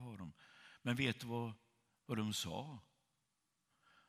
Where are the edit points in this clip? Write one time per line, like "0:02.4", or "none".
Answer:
none